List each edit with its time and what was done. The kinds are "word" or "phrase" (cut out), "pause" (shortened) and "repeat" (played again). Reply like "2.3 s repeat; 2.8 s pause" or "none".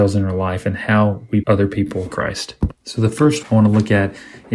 1.4 s word; 2.1 s word; 2.7 s pause; 3.4 s word